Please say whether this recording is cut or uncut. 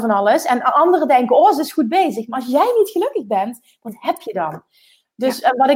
uncut